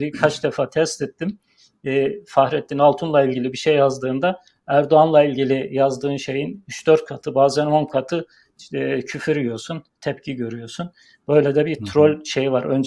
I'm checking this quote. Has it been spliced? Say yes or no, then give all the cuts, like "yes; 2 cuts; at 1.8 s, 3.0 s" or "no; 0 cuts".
no; 0 cuts